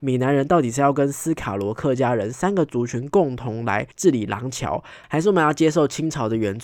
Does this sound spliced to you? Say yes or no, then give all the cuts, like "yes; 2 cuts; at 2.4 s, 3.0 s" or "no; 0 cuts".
yes; 1 cut; at 3.9 s